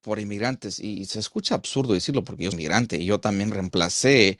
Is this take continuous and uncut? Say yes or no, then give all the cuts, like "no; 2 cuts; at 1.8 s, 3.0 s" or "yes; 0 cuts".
no; 1 cut; at 2.5 s